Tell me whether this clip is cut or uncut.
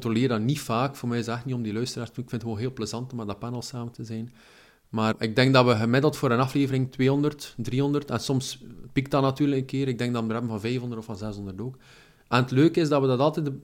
uncut